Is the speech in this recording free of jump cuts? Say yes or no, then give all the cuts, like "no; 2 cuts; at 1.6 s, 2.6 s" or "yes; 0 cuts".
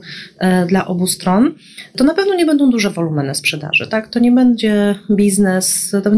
yes; 0 cuts